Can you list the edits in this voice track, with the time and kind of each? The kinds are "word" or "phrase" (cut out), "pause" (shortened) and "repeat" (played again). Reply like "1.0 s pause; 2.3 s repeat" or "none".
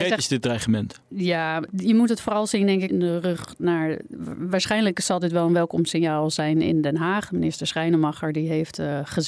2.9 s phrase